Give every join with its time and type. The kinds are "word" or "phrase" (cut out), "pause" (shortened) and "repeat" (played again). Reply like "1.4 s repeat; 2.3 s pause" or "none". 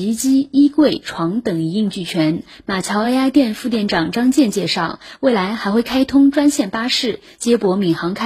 none

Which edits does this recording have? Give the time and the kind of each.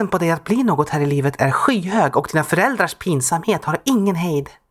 none

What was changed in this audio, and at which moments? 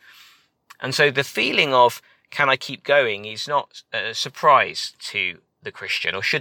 none

